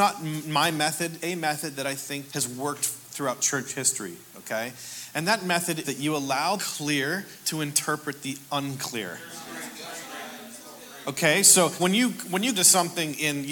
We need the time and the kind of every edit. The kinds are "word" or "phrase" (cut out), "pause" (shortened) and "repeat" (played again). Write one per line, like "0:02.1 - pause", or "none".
0:01.2 - word
0:02.3 - word
0:05.8 - word
0:06.6 - word
0:11.8 - word
0:12.5 - word